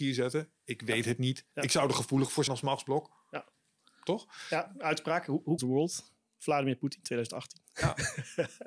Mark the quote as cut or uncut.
cut